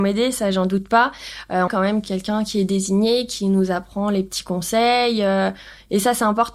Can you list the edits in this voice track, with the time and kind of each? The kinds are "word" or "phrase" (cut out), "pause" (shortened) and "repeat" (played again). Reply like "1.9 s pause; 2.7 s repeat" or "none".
1.7 s phrase

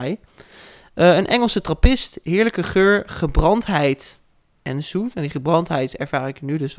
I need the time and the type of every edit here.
none

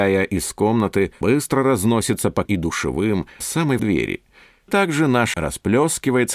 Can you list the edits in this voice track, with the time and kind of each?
1.2 s word; 2.4 s word; 3.4 s word; 3.8 s word; 4.7 s word; 5.3 s word

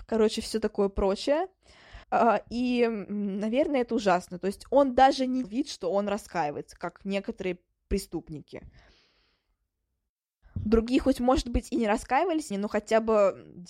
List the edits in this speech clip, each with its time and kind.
2.0 s pause; 5.4 s word; 12.5 s word

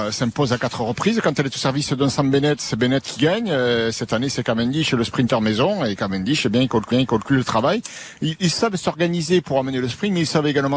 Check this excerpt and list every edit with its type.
6.9 s repeat

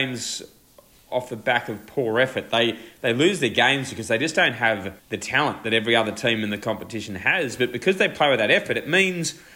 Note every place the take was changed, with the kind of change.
5.0 s pause

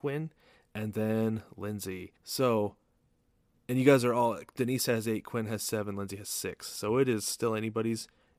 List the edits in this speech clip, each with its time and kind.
2.2 s pause

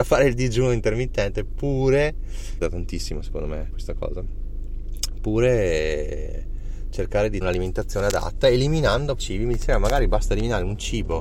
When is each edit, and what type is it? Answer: 2.6 s phrase; 3.7 s word; 7.4 s word; 9.2 s word

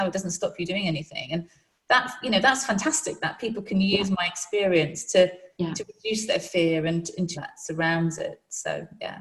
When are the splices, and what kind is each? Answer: 7.3 s phrase

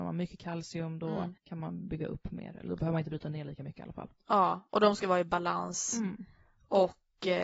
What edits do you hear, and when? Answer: 1.4 s pause

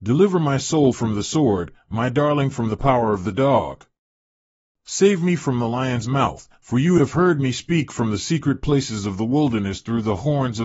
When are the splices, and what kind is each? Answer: none

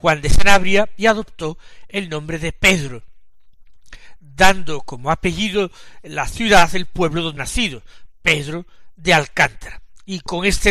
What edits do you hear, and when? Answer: 7.4 s word

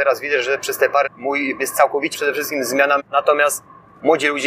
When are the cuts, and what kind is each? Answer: 1.0 s word; 1.6 s word; 2.1 s word; 3.0 s word

